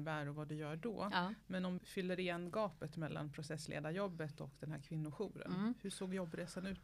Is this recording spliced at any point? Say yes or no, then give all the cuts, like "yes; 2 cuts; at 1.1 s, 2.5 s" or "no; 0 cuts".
yes; 1 cut; at 1.8 s